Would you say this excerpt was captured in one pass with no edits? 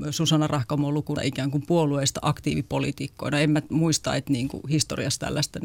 no; 1 cut; at 1.1 s

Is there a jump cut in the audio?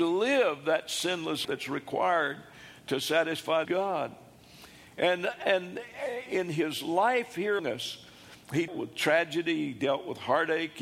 yes; 5 cuts; at 1.4 s, 3.6 s, 6.3 s, 7.6 s, 8.7 s

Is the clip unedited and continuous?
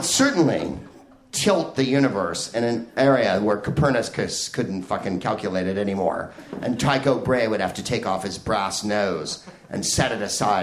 yes; 0 cuts

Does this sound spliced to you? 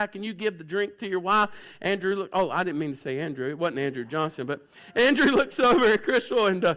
no; 0 cuts

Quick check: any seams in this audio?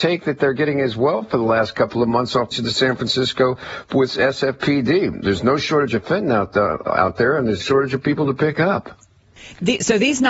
yes; 3 cuts; at 2.5 s, 6.8 s, 7.6 s

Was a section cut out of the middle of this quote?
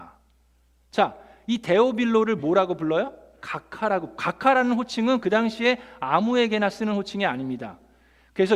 no; 0 cuts

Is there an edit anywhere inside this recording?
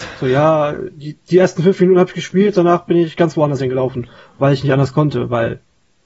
no; 0 cuts

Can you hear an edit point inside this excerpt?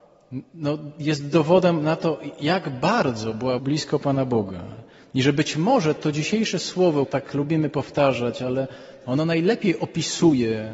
yes; 3 cuts; at 3.6 s, 6.0 s, 7.1 s

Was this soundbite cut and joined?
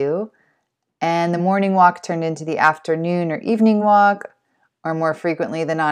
no; 0 cuts

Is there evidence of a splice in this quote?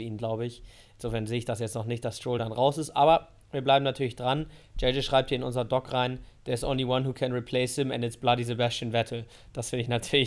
no; 0 cuts

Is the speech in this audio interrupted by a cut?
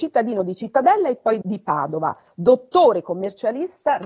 yes; 1 cut; at 1.4 s

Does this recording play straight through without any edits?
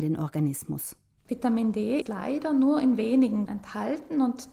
no; 2 cuts; at 2.0 s, 3.5 s

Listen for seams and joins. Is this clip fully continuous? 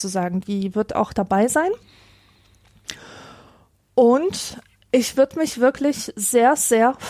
yes; 0 cuts

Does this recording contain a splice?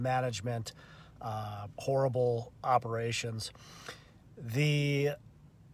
no; 0 cuts

